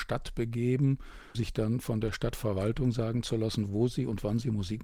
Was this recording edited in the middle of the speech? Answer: yes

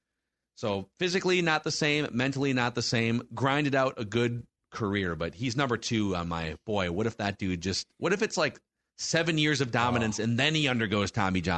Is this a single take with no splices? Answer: yes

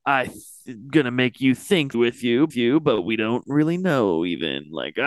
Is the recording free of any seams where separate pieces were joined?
no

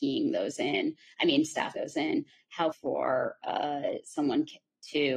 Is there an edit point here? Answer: yes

